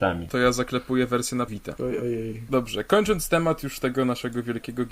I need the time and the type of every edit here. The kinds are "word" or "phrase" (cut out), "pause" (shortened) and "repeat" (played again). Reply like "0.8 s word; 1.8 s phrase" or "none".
1.5 s word

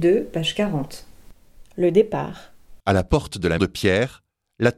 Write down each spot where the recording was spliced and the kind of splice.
2.8 s pause; 3.6 s word

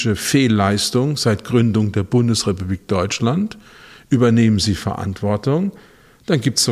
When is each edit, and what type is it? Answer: none

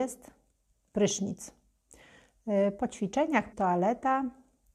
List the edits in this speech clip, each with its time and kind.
3.5 s word

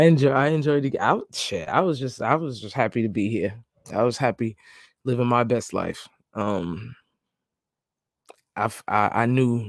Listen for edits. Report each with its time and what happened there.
none

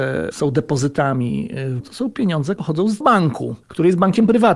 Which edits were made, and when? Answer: 1.8 s word; 2.6 s word; 3.0 s word; 3.6 s pause

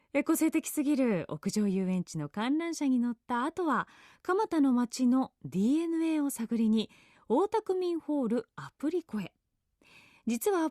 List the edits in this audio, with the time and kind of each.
none

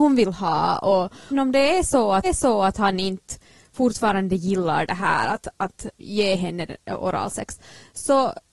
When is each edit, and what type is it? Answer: 1.3 s phrase; 2.2 s repeat; 6.0 s pause

